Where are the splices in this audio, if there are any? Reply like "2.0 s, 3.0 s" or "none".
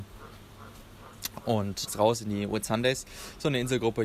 1.9 s